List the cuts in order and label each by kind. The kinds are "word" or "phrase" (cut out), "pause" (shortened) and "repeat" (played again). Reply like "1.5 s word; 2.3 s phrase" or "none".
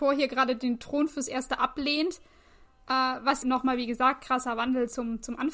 3.4 s word